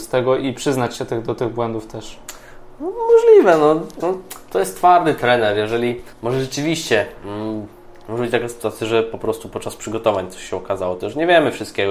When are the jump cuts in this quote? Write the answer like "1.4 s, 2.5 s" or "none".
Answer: 4.0 s, 6.1 s